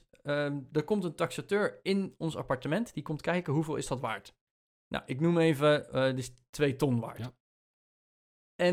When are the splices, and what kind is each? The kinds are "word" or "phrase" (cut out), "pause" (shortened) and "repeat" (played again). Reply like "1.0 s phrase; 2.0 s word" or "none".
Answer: none